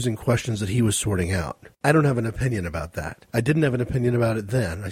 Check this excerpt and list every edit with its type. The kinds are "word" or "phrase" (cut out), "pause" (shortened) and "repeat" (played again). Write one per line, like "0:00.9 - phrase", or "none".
0:01.7 - pause
0:03.3 - pause